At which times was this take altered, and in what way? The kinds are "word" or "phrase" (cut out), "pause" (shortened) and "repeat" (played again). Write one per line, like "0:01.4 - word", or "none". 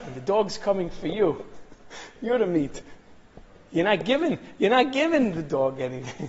none

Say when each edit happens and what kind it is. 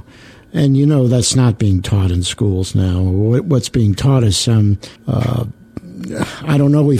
0:05.0 - pause

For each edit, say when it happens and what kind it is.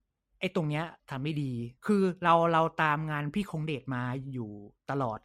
0:01.0 - pause
0:01.8 - pause

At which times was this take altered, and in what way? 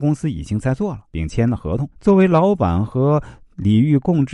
0:01.1 - pause
0:01.9 - pause

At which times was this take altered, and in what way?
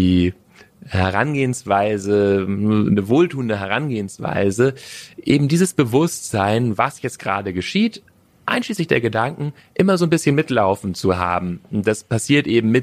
none

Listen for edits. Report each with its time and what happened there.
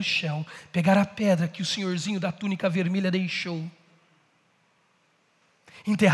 none

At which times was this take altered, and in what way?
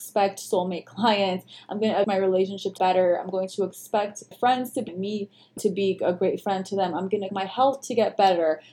0:02.0 - word
0:02.8 - word
0:04.3 - word
0:04.9 - word
0:05.6 - word
0:07.3 - word

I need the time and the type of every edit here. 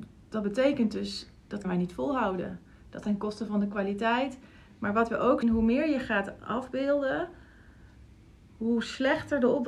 0:01.6 - word
0:03.0 - word
0:05.4 - word

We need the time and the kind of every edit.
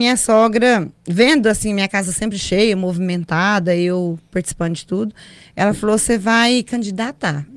none

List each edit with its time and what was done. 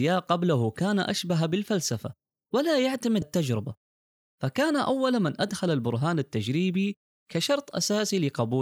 0:03.2 - word

